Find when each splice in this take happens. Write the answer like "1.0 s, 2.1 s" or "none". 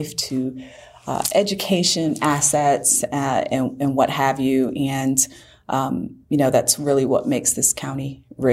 none